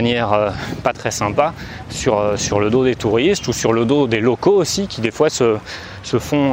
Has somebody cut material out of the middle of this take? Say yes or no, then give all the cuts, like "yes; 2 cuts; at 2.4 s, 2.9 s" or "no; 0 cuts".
no; 0 cuts